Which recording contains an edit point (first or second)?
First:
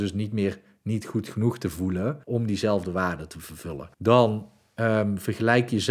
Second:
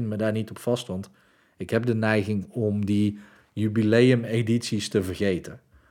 first